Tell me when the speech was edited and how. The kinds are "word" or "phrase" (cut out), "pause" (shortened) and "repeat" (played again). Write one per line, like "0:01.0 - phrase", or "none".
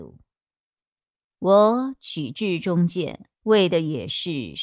0:03.3 - pause